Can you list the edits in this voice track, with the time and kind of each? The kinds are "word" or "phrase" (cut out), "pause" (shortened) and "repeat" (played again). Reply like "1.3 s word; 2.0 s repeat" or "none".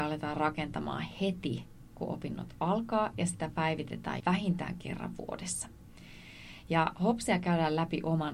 4.2 s phrase